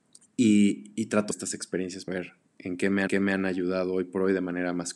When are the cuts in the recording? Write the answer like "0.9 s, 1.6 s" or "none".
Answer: 1.3 s, 2.1 s, 2.5 s, 3.1 s

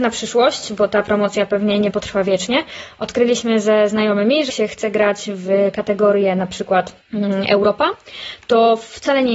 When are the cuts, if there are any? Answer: 4.5 s

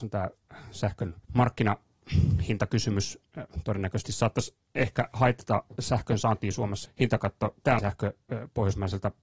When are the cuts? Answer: 1.2 s, 6.9 s, 7.8 s

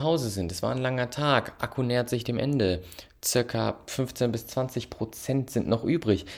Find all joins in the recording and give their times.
none

